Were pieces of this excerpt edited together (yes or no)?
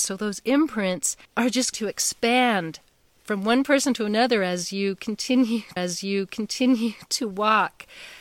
yes